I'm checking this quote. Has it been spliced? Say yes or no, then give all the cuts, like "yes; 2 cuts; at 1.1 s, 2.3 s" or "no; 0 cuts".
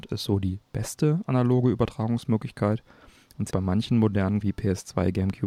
yes; 2 cuts; at 3.5 s, 4.4 s